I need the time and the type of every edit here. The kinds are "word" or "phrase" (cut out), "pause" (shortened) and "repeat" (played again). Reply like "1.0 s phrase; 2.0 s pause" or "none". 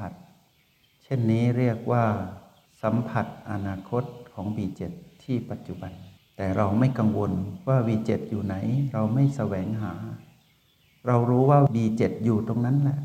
6.2 s pause